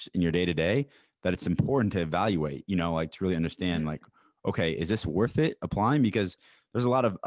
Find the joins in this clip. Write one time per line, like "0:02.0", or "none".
none